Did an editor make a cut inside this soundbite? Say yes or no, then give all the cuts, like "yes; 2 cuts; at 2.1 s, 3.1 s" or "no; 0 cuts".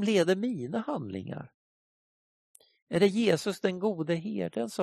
no; 0 cuts